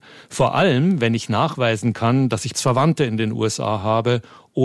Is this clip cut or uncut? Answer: cut